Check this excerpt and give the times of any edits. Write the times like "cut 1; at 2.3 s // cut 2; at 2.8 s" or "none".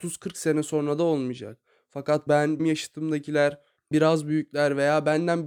cut 1; at 2.3 s // cut 2; at 2.6 s // cut 3; at 3.9 s